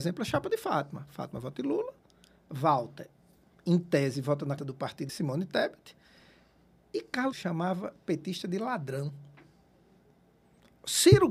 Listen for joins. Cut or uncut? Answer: cut